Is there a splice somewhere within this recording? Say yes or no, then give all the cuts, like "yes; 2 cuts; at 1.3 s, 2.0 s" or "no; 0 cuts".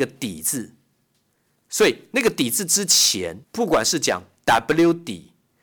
yes; 1 cut; at 3.4 s